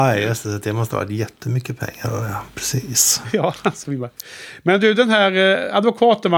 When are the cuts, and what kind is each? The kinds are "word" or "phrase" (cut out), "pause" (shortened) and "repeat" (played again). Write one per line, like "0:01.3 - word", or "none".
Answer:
none